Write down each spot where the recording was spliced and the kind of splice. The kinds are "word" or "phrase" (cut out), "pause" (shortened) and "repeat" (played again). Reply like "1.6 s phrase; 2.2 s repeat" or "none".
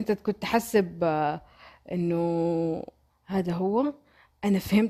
3.1 s word